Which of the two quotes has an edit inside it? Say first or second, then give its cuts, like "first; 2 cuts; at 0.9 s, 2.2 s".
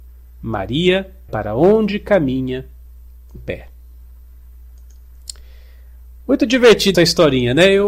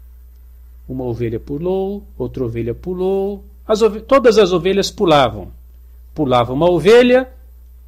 first; 3 cuts; at 1.3 s, 3.4 s, 6.9 s